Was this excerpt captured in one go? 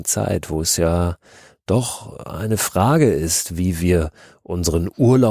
yes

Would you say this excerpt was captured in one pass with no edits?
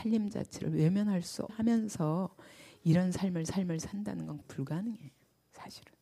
no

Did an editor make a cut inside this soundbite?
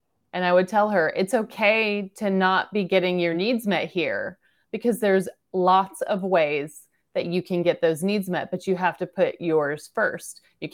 no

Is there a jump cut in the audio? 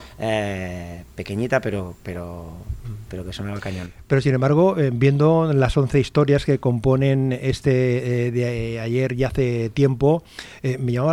no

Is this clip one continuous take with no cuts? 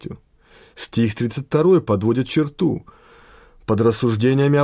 yes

